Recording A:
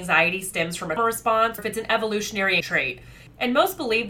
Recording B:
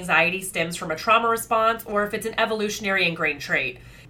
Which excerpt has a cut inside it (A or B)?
A